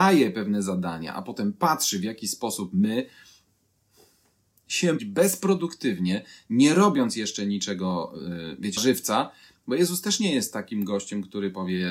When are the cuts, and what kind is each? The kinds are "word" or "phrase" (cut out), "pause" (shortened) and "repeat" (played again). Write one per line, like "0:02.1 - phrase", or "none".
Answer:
0:05.0 - phrase
0:08.8 - word